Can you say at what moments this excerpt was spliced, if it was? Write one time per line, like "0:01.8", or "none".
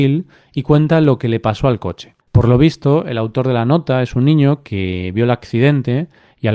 0:02.2